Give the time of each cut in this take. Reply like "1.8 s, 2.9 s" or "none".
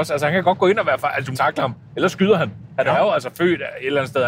1.3 s